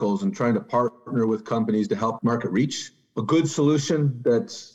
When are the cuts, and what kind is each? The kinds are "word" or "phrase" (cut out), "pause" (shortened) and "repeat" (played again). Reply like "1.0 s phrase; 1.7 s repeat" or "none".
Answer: 2.2 s word

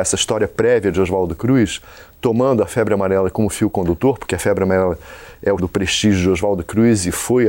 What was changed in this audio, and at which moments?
5.6 s word

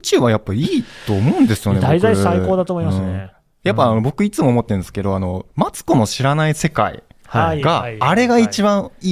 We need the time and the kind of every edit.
none

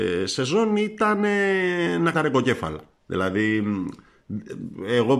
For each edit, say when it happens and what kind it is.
2.1 s word

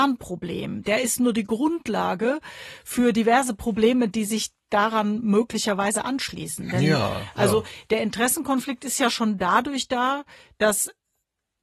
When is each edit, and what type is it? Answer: none

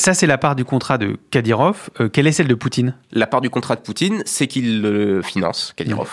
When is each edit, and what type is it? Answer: none

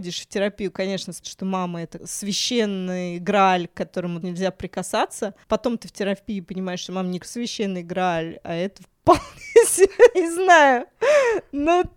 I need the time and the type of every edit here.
1.2 s word; 2.0 s word; 4.2 s word; 5.4 s pause; 7.2 s word; 10.1 s word

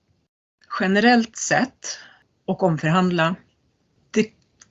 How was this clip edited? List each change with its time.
none

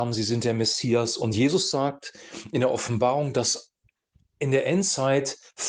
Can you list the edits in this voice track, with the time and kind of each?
none

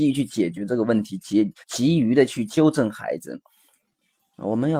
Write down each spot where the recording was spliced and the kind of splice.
1.6 s pause

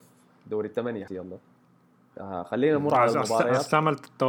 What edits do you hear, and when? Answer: 1.1 s word

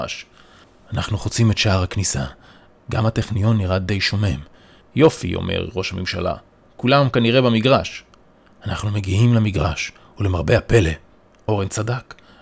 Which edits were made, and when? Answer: none

